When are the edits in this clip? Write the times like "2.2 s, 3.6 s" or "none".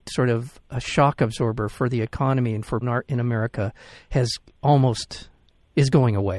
2.8 s